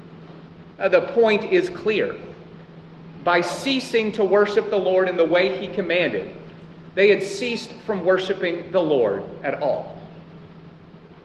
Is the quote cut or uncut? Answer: uncut